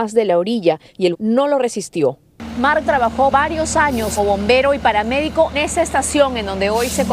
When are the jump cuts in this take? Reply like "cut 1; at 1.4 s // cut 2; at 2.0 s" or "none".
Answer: cut 1; at 1.1 s // cut 2; at 2.8 s // cut 3; at 3.3 s // cut 4; at 4.2 s // cut 5; at 5.5 s